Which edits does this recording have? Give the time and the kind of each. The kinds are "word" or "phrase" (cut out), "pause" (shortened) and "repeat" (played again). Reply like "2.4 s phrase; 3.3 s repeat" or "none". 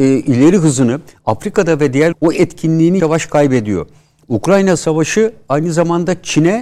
2.1 s word; 3.0 s word